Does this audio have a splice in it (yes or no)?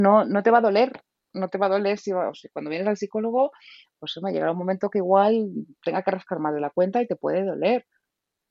no